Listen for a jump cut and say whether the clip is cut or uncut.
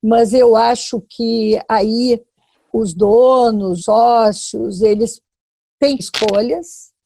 cut